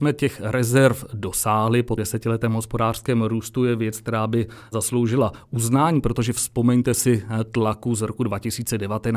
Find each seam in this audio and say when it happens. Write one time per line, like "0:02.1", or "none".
0:02.0

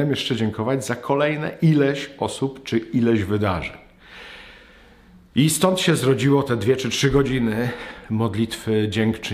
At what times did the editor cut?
none

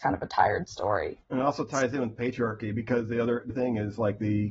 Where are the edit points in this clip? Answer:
0:01.2
0:03.5

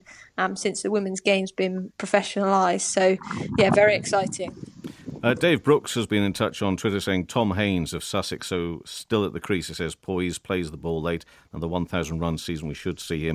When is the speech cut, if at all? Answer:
none

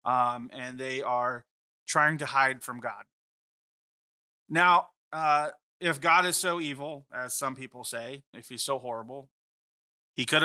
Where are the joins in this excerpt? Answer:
0:08.3

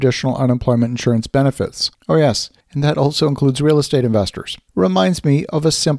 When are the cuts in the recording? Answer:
0:01.9
0:02.6
0:04.7

